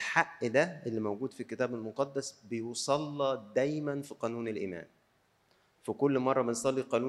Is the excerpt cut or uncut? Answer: uncut